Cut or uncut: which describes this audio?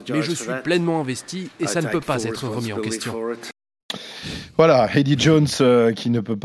uncut